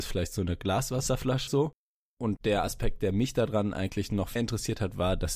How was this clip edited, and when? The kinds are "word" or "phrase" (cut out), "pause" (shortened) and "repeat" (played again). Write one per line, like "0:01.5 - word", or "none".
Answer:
0:01.5 - word
0:02.4 - word
0:04.4 - word